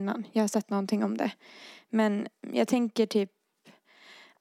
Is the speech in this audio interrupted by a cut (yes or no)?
no